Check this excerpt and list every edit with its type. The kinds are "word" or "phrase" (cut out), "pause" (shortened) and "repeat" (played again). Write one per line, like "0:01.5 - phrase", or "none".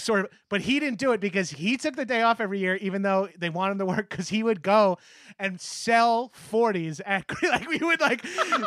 none